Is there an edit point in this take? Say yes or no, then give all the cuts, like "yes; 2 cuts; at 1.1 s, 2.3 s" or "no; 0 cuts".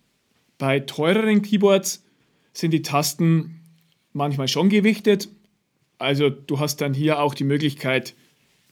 no; 0 cuts